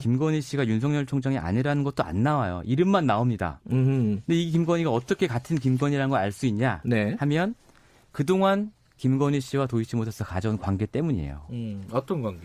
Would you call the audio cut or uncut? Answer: uncut